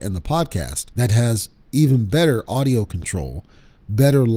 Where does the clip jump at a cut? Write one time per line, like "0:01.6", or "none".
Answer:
0:00.9